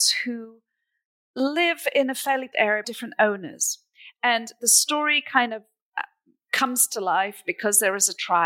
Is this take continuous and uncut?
no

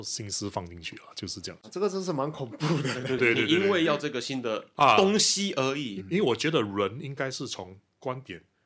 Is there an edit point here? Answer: yes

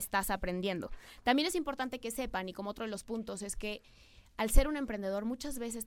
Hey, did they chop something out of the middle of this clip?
no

